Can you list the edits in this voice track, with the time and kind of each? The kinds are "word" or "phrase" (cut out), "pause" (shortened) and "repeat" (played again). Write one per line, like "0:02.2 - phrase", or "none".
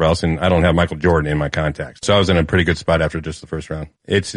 none